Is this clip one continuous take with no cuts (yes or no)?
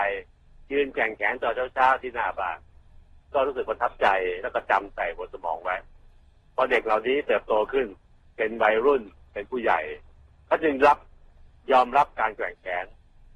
yes